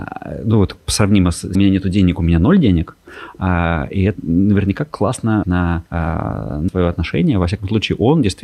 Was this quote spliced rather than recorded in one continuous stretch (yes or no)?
yes